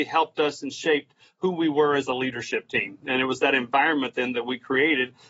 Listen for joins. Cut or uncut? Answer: uncut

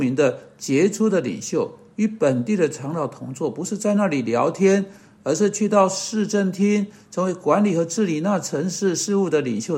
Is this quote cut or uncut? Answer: uncut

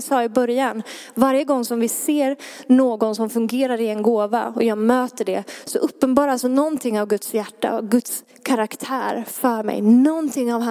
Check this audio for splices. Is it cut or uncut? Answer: uncut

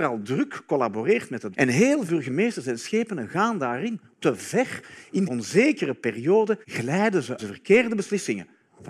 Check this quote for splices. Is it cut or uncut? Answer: cut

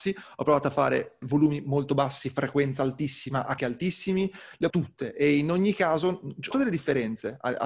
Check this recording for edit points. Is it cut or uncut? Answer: cut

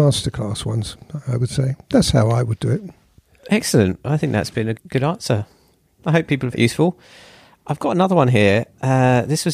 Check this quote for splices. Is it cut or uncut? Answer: cut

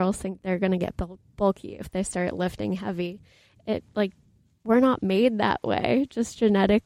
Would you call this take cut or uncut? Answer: uncut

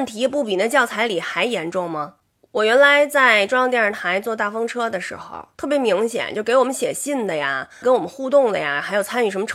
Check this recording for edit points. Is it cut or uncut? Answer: cut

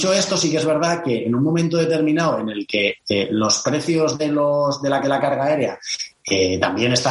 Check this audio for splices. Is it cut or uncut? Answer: cut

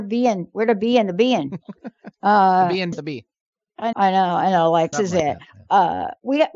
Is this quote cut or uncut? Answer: cut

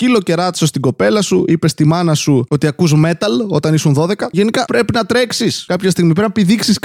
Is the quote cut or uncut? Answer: uncut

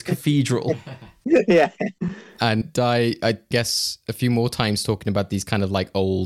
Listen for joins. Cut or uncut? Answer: cut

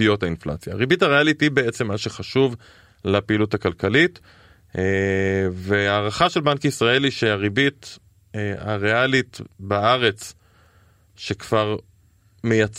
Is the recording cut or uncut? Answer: uncut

